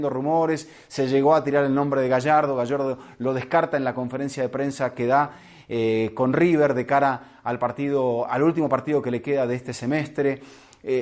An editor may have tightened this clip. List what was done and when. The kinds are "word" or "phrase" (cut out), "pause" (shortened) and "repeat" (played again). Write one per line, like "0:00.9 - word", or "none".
none